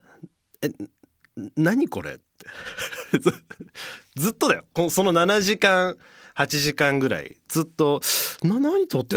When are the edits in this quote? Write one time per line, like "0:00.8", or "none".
none